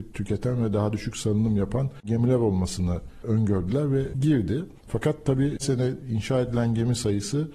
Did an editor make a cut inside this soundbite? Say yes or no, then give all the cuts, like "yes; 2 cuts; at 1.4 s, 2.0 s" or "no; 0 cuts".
yes; 3 cuts; at 4.1 s, 4.8 s, 5.6 s